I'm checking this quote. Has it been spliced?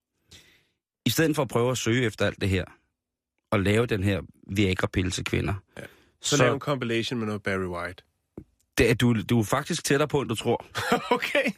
no; 0 cuts

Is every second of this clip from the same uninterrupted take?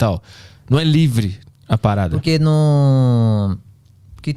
yes; 0 cuts

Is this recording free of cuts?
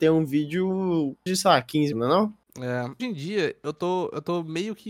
no; 4 cuts; at 1.3 s, 1.9 s, 2.4 s, 3.0 s

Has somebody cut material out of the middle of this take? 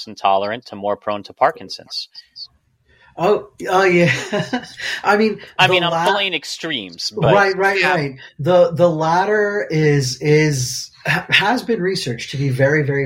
no; 0 cuts

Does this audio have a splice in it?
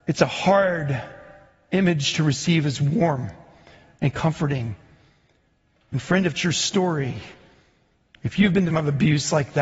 yes; 2 cuts; at 6.4 s, 8.7 s

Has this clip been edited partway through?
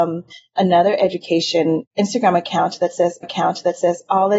yes; 1 cut; at 3.2 s

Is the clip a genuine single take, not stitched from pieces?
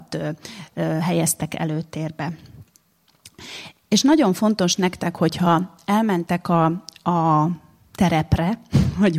yes; 0 cuts

